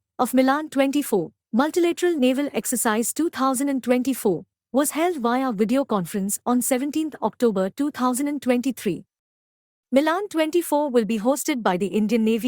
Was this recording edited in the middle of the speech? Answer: no; 0 cuts

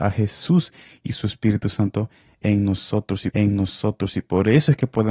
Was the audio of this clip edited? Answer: yes; 1 cut; at 3.3 s

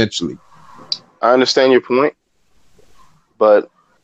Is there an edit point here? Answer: no; 0 cuts

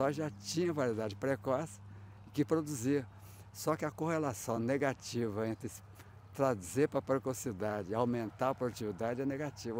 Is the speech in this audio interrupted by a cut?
no; 0 cuts

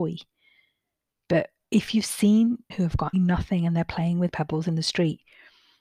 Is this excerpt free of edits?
no; 2 cuts; at 2.7 s, 3.1 s

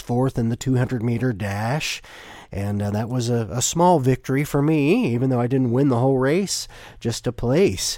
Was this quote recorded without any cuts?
yes; 0 cuts

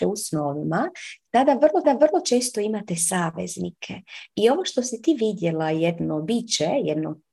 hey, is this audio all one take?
no; 1 cut; at 1.8 s

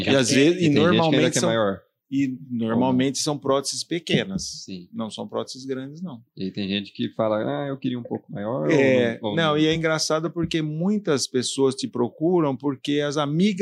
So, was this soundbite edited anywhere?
no; 0 cuts

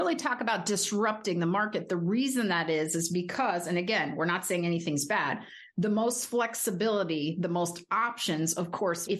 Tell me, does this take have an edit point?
no; 0 cuts

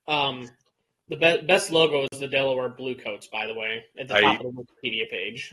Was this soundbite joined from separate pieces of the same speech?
no; 0 cuts

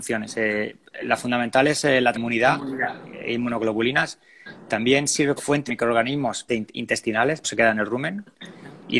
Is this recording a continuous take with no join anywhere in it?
no; 5 cuts; at 2.1 s, 5.4 s, 5.7 s, 6.5 s, 7.4 s

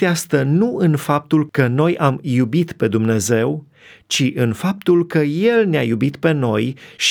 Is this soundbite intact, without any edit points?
yes; 0 cuts

